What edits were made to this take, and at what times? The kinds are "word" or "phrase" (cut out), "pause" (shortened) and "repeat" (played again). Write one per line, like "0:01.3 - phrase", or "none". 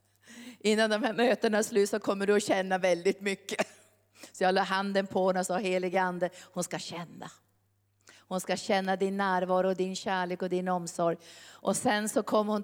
none